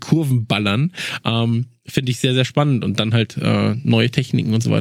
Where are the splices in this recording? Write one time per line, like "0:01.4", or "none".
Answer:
none